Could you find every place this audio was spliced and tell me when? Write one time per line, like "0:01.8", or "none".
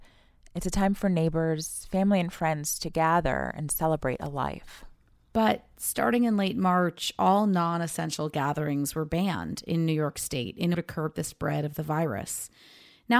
0:10.7